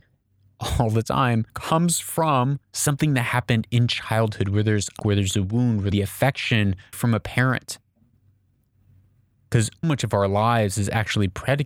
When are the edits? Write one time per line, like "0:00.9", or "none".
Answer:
0:01.5
0:02.6
0:05.0
0:05.9
0:06.9
0:09.8

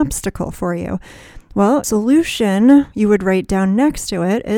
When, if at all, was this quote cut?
0:01.8

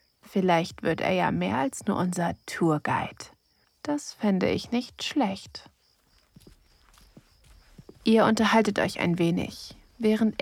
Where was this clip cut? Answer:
0:03.6

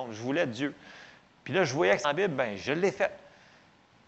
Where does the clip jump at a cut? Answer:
0:02.0

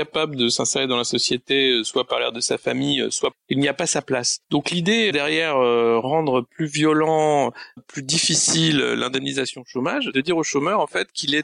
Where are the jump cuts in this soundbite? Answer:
0:03.3
0:04.4
0:05.1
0:07.8
0:10.1

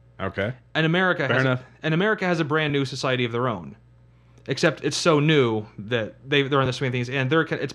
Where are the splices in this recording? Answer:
none

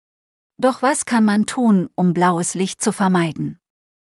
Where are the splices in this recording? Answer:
none

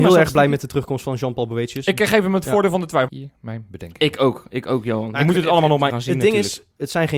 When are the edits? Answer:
0:03.1
0:05.9

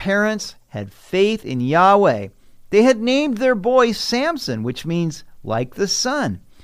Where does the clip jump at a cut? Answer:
none

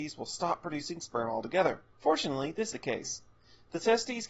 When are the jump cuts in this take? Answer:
0:01.9
0:02.7

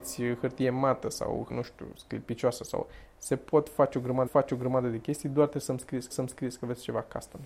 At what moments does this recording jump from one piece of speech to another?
0:01.5
0:04.3
0:06.1

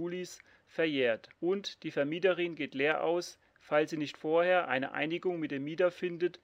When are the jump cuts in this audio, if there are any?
0:01.3

